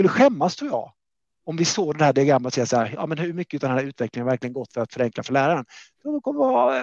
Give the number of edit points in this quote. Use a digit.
0